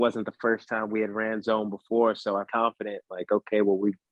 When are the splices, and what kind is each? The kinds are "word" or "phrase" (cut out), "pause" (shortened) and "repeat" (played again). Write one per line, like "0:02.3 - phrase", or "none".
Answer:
0:02.5 - phrase